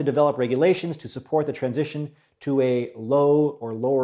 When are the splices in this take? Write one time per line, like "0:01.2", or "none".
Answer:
none